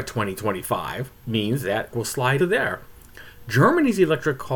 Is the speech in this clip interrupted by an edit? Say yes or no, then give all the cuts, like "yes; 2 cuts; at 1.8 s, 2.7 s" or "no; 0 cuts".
yes; 3 cuts; at 1.2 s, 1.9 s, 2.4 s